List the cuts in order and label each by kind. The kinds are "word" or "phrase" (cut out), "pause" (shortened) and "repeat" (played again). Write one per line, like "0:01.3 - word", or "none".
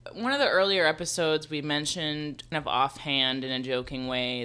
0:02.5 - word